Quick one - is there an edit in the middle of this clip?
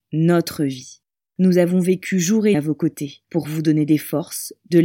yes; 3 cuts; at 1.1 s, 2.5 s, 3.2 s

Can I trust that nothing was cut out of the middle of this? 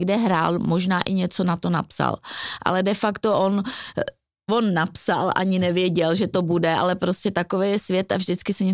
yes; 0 cuts

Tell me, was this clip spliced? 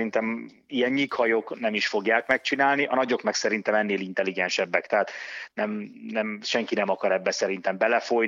no; 0 cuts

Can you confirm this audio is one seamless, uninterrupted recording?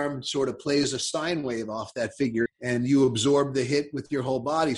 no; 1 cut; at 2.5 s

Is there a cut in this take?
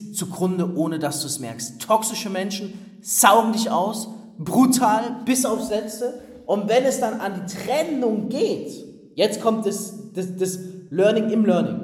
no; 0 cuts

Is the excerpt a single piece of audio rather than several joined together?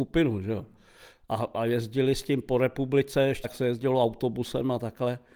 no; 1 cut; at 3.4 s

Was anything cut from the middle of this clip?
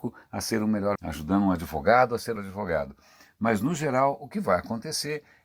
yes; 2 cuts; at 1.0 s, 2.4 s

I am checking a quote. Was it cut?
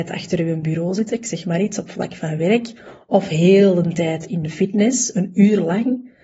no; 0 cuts

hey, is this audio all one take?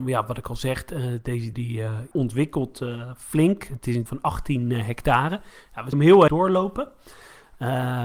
no; 5 cuts; at 1.5 s, 2.1 s, 4.1 s, 5.9 s, 6.3 s

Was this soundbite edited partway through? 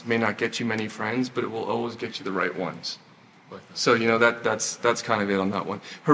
no; 0 cuts

